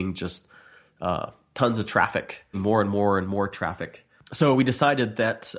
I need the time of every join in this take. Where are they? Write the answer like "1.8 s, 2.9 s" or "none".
2.5 s